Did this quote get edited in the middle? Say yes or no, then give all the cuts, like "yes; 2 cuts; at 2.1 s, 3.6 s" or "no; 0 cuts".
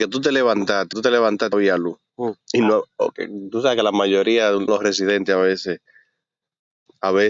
yes; 4 cuts; at 0.9 s, 1.5 s, 2.4 s, 4.7 s